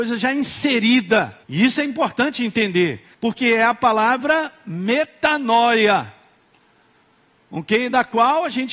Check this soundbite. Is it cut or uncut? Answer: cut